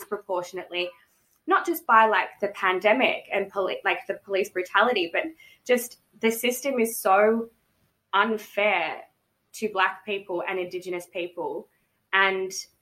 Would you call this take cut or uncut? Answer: uncut